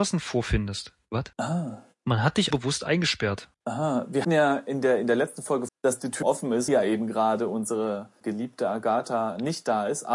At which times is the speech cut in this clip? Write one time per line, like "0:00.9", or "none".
0:01.3
0:02.5
0:03.5
0:04.2
0:05.7
0:06.2
0:06.7
0:08.2